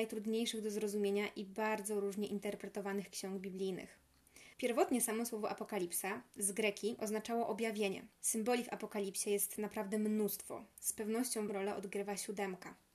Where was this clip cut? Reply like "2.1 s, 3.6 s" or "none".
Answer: 4.5 s, 8.1 s, 11.5 s